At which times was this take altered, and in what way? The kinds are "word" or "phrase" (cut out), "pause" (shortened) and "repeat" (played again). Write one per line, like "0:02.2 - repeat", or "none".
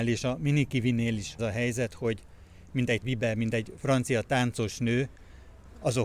0:01.4 - word
0:03.0 - word